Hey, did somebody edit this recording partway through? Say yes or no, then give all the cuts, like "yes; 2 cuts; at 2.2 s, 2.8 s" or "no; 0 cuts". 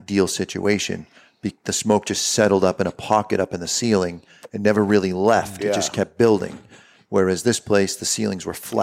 no; 0 cuts